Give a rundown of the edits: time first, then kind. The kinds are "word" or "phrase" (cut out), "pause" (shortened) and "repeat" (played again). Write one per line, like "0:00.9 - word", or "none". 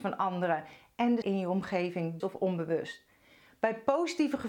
0:01.2 - word
0:02.2 - word